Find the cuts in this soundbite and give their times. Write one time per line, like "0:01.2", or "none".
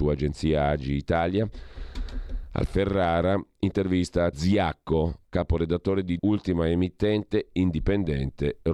0:02.7
0:04.3
0:06.2